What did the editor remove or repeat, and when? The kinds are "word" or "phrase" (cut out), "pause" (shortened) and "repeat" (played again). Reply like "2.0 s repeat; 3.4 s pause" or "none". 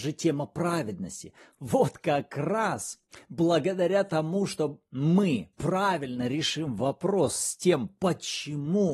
none